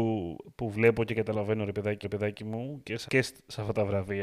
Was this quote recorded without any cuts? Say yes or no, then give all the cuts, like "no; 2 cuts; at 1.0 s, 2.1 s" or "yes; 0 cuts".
no; 2 cuts; at 2.0 s, 3.1 s